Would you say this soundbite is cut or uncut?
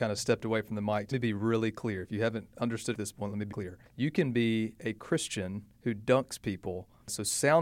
cut